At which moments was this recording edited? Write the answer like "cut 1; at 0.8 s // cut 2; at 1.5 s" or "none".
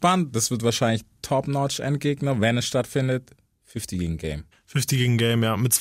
cut 1; at 1.2 s